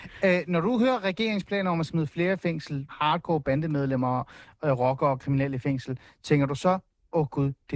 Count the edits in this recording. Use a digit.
1